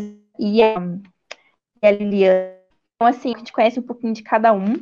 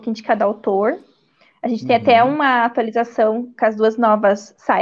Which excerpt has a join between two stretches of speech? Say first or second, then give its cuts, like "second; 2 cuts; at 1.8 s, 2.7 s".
first; 3 cuts; at 3.0 s, 3.3 s, 3.7 s